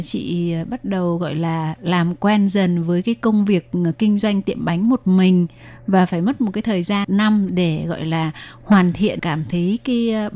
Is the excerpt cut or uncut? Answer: cut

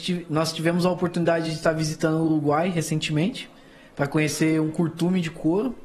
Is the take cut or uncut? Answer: uncut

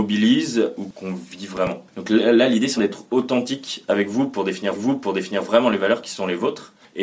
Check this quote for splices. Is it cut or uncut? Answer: cut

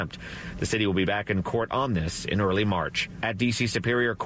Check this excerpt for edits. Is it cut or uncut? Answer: uncut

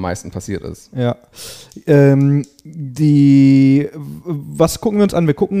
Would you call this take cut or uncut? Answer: uncut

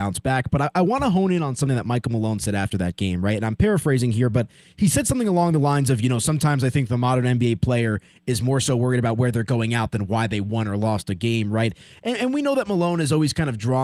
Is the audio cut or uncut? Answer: uncut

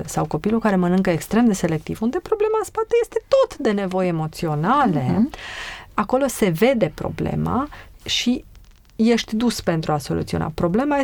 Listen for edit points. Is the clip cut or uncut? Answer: uncut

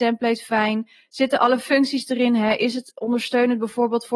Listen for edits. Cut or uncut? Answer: uncut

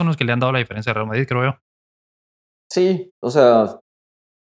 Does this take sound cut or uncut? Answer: uncut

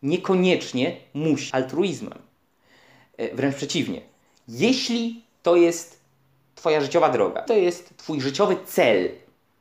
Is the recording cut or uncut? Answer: cut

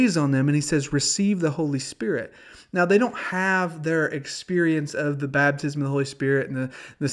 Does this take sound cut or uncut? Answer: uncut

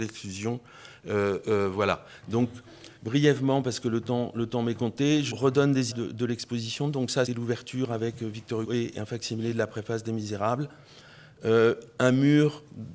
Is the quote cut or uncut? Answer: cut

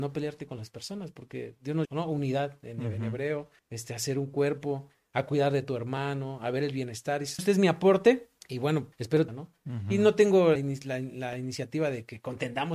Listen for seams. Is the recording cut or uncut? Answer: cut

